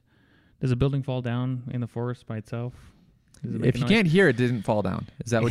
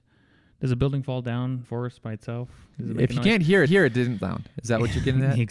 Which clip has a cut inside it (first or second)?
second